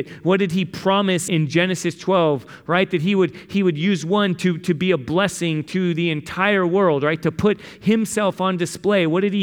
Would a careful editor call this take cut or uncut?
cut